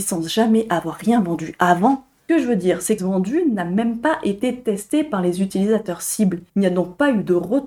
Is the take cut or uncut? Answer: cut